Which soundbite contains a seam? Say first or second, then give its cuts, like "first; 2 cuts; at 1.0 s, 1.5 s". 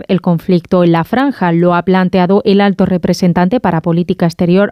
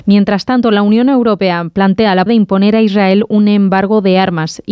second; 1 cut; at 2.3 s